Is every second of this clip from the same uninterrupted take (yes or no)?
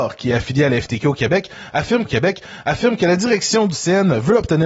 no